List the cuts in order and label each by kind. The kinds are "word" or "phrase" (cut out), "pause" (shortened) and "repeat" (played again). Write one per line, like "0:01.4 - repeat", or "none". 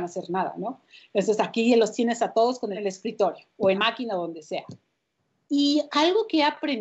0:02.7 - phrase
0:03.7 - word
0:05.0 - pause